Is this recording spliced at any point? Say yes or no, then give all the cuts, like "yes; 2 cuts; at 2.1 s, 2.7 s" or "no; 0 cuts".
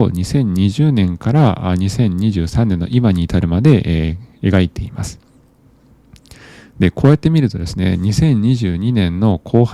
no; 0 cuts